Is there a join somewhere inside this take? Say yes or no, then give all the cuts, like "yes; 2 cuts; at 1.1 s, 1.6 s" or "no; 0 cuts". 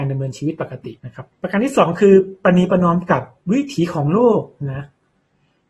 yes; 2 cuts; at 1.0 s, 1.3 s